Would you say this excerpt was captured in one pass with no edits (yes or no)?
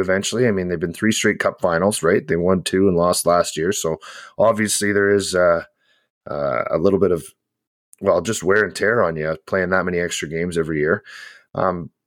yes